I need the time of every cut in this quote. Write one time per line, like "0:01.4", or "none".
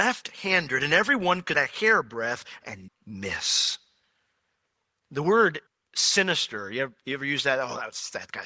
0:01.5
0:02.9
0:05.7